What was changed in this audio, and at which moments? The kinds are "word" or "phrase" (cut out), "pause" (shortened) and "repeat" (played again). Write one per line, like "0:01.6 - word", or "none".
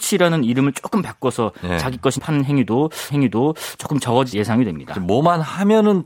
0:02.2 - word
0:03.1 - repeat
0:04.3 - word